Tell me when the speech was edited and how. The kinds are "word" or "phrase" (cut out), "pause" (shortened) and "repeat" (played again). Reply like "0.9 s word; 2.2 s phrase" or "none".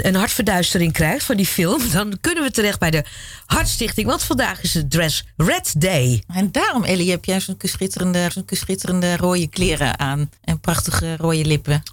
8.3 s repeat; 10.4 s pause